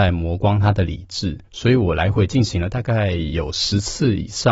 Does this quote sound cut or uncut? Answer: cut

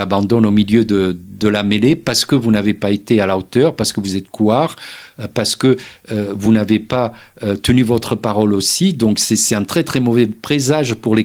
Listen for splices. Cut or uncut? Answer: uncut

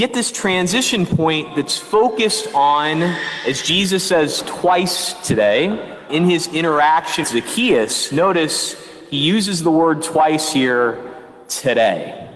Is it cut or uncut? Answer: cut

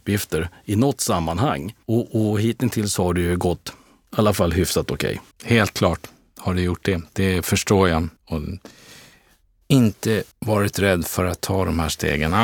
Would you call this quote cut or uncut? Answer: cut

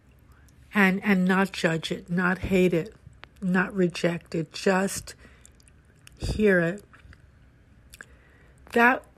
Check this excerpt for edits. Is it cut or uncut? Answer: uncut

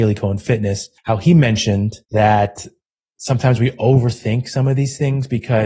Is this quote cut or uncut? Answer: cut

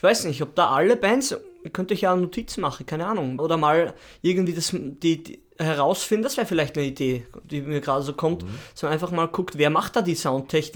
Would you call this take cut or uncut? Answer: cut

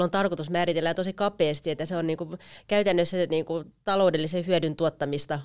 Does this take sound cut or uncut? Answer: uncut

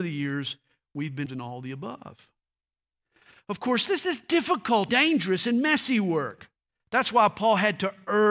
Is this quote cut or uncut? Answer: cut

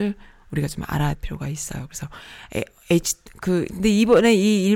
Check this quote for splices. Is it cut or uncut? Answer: cut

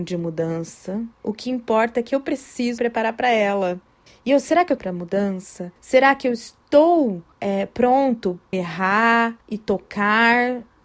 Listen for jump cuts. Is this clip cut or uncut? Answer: cut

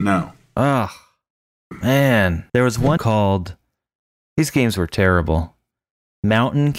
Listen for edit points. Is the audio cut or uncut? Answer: cut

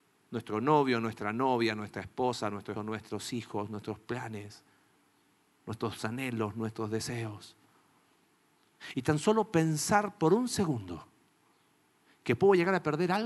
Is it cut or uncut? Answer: cut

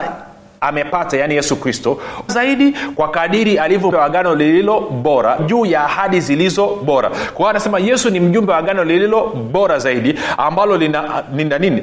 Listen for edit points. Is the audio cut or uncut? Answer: cut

